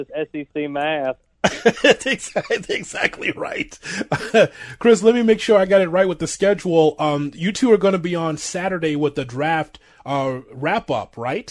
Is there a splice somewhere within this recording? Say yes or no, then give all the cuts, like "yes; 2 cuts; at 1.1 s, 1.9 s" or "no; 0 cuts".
no; 0 cuts